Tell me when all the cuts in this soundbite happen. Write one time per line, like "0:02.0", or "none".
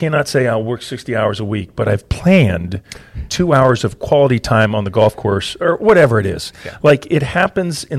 none